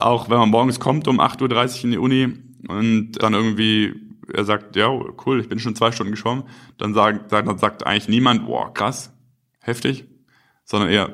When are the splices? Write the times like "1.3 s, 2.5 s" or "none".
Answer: 3.2 s